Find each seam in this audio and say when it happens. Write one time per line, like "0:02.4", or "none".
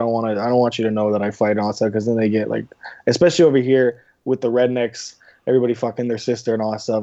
none